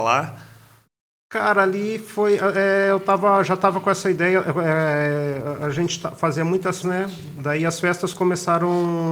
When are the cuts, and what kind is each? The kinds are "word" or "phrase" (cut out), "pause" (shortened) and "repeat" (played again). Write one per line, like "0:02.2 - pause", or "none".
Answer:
0:06.8 - word